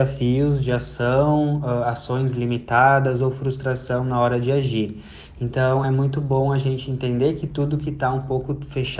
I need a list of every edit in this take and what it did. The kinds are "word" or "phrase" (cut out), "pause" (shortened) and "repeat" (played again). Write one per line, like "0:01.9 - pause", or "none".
none